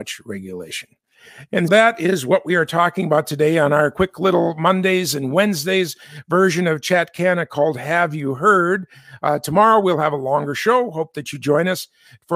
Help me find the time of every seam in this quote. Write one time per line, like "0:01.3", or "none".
0:01.7